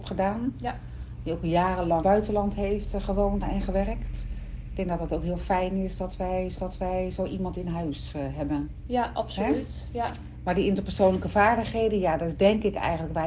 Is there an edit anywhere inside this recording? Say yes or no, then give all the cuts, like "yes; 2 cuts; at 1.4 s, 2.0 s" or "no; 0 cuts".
yes; 3 cuts; at 2.0 s, 3.4 s, 6.6 s